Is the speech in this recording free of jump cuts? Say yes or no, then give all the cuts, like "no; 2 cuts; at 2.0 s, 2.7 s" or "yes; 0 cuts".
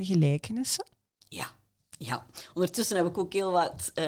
yes; 0 cuts